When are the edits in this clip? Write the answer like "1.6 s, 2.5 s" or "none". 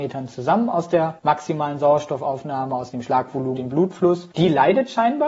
1.2 s, 2.9 s, 3.6 s, 4.3 s